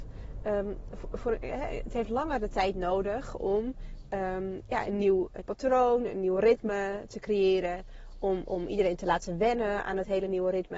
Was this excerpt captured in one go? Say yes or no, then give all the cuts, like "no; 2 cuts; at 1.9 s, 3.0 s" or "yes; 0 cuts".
no; 1 cut; at 5.4 s